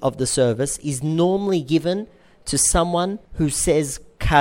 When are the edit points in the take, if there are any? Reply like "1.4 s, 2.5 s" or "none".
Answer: 3.2 s